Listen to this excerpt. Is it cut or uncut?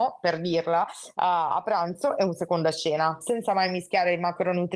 uncut